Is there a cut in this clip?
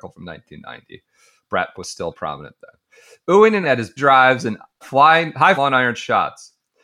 yes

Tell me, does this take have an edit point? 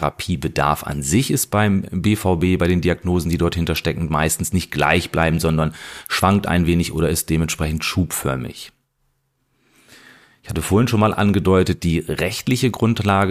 no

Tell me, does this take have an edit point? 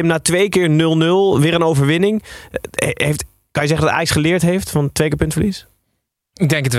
no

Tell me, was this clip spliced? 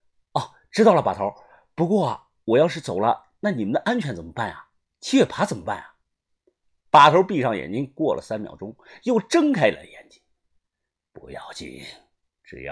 no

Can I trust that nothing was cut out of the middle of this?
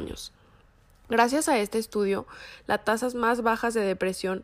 yes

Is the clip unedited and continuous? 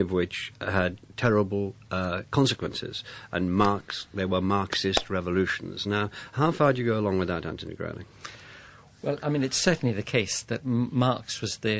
yes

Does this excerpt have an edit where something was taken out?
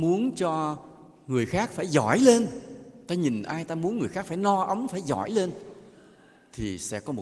no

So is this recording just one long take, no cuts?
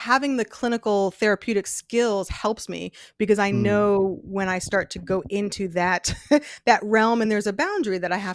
yes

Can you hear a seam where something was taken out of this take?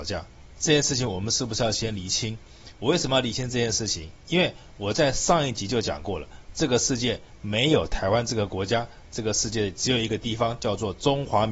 no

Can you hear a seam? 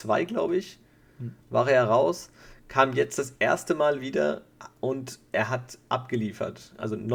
no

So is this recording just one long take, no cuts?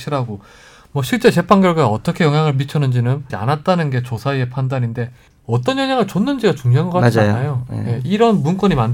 no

